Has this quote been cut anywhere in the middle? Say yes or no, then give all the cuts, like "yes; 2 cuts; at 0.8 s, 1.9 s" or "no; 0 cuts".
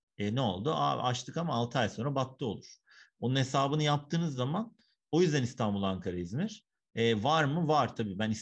no; 0 cuts